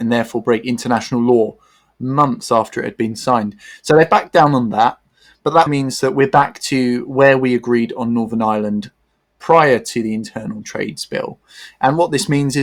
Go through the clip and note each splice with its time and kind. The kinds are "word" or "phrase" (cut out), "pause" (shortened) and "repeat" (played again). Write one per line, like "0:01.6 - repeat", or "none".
0:05.7 - word